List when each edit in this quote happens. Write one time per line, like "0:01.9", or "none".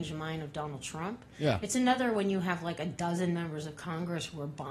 none